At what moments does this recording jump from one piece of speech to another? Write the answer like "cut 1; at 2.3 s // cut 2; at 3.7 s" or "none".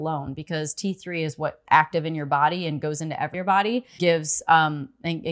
cut 1; at 1.6 s // cut 2; at 3.3 s // cut 3; at 4.0 s